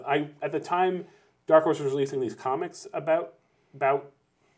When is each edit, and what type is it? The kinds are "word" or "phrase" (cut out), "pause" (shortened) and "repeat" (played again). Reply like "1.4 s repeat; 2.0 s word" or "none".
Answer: none